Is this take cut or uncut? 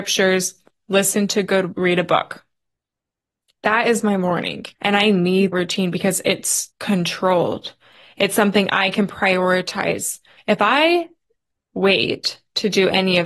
cut